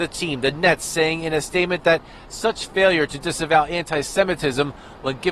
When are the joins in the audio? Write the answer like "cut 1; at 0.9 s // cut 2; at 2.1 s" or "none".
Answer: none